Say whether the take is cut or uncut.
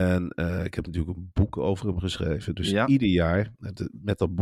uncut